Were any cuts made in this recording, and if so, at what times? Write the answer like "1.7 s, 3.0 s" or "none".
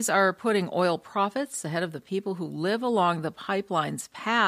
none

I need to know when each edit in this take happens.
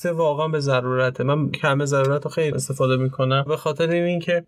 1.5 s, 2.5 s, 3.5 s

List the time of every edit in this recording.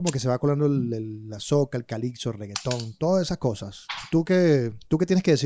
none

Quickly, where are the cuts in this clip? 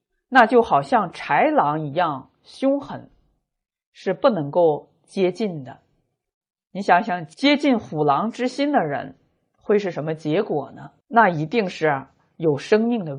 11.0 s

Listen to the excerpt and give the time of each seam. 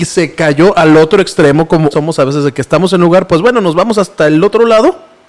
1.9 s

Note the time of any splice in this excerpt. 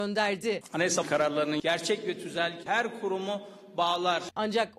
1.0 s, 2.6 s

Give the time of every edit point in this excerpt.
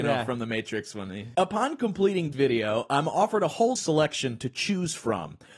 2.3 s, 3.8 s

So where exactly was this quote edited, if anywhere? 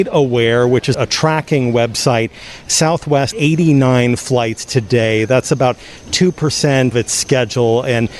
0.9 s, 3.3 s, 6.9 s

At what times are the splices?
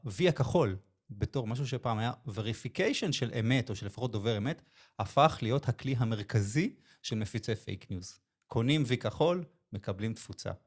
none

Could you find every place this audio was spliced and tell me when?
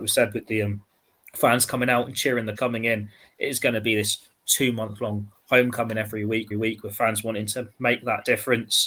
2.6 s, 6.5 s

